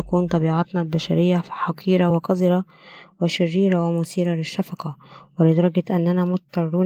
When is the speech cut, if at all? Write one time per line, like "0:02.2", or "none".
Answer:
none